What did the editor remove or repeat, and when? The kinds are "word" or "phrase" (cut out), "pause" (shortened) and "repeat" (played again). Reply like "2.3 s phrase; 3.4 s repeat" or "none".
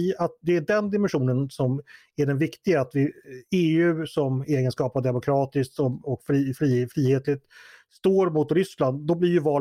none